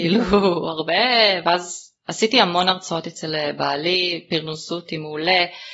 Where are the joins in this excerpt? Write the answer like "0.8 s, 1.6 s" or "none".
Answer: 2.0 s